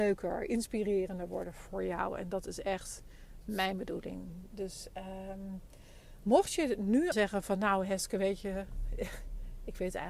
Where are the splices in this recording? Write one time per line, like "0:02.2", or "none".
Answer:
0:07.1